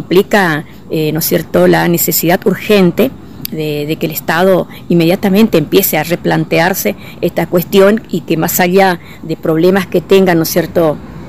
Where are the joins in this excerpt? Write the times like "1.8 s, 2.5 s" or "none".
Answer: none